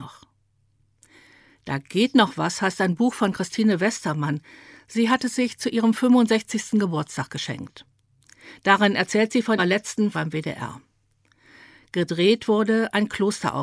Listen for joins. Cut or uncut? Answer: cut